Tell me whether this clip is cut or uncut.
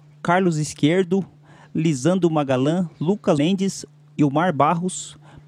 cut